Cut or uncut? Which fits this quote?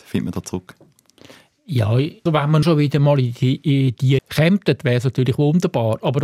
cut